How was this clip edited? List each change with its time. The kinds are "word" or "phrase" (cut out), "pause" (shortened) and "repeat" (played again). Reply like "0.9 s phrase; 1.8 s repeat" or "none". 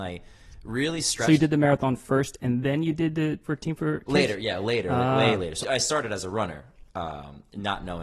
3.4 s word; 5.6 s word

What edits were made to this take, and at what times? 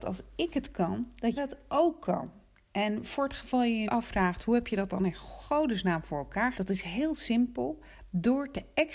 1.4 s word; 3.9 s word; 6.5 s word

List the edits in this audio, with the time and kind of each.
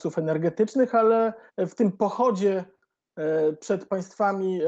1.5 s pause

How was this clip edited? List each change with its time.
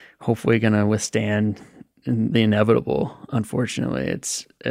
2.3 s word

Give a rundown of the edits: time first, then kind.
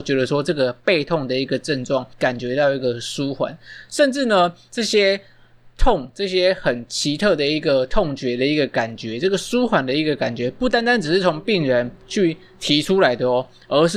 2.1 s pause

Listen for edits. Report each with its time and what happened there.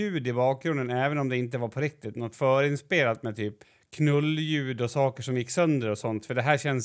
3.6 s pause

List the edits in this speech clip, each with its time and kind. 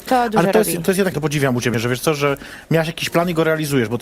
1.1 s word; 1.7 s word

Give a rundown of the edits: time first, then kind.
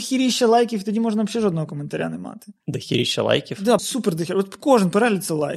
2.6 s pause; 3.8 s word

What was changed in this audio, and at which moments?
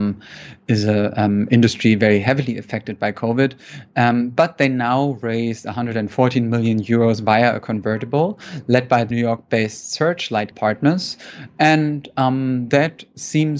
9.1 s word; 10.5 s word

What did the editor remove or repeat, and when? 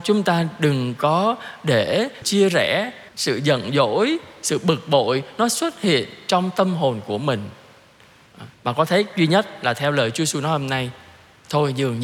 2.2 s word; 3.1 s pause; 8.5 s pause; 9.1 s word

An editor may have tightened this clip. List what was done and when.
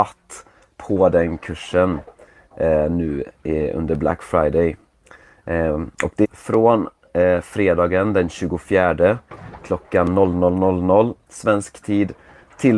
5.9 s pause; 6.2 s phrase

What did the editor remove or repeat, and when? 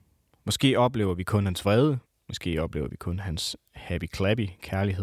2.1 s pause

